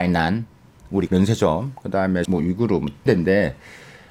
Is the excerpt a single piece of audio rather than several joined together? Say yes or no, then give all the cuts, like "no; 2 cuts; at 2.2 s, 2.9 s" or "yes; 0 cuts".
no; 3 cuts; at 1.1 s, 2.2 s, 3.1 s